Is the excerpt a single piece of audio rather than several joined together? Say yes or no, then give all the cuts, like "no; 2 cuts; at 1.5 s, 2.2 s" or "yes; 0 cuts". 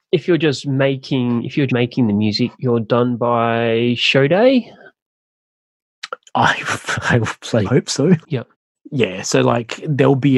no; 3 cuts; at 1.7 s, 2.5 s, 7.6 s